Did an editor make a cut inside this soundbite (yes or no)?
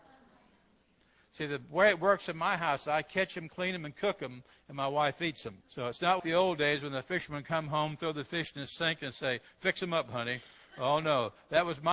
yes